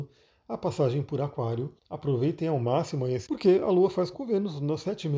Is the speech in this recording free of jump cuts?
no; 3 cuts; at 1.8 s, 3.3 s, 4.1 s

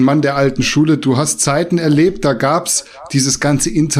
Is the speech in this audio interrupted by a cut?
no; 0 cuts

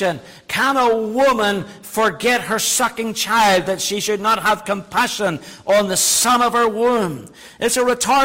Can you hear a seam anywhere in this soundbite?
no; 0 cuts

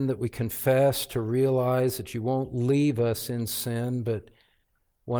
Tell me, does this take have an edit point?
no; 0 cuts

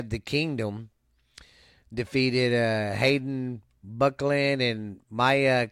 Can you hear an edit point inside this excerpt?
no; 0 cuts

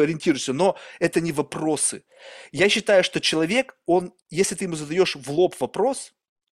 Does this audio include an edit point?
no; 0 cuts

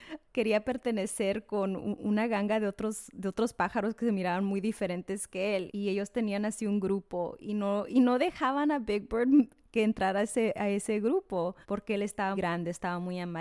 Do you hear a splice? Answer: yes; 3 cuts; at 5.7 s, 11.6 s, 12.3 s

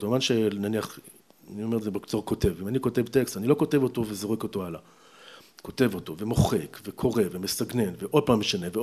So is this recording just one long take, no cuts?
yes; 0 cuts

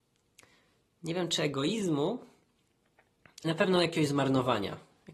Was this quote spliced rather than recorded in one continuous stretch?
yes; 1 cut; at 3.4 s

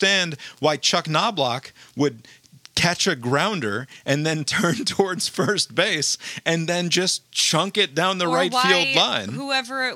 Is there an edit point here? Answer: no; 0 cuts

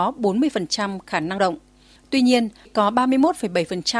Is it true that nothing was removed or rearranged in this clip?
no; 3 cuts; at 1.0 s, 1.4 s, 2.7 s

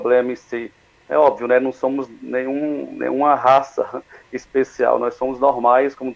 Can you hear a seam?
no; 0 cuts

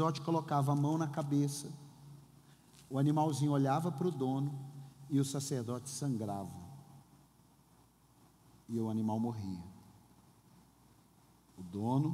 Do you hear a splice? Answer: no; 0 cuts

